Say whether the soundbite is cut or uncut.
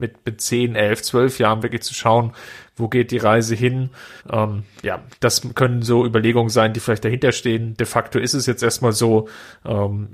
cut